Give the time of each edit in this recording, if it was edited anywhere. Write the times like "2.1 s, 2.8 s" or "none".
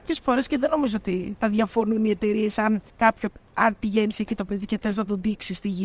2.9 s